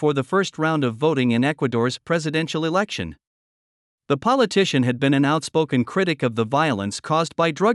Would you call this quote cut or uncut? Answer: uncut